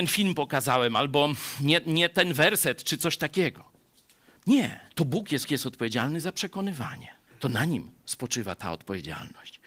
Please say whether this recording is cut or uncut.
cut